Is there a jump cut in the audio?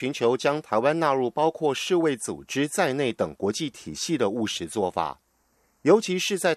no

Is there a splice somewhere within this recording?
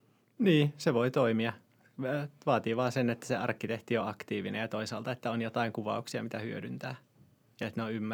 no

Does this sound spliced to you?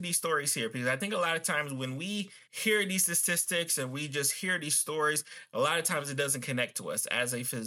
yes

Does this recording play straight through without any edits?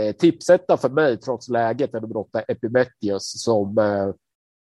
yes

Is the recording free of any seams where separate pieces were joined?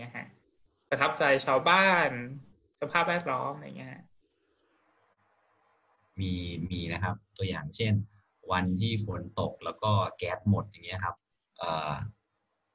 yes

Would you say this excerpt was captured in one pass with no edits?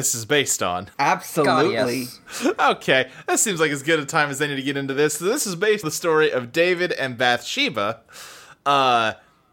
no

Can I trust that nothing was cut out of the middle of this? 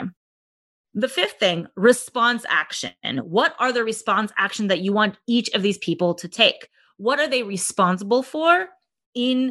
yes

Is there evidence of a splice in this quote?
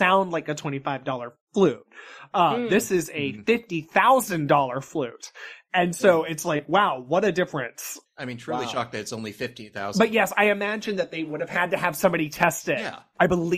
no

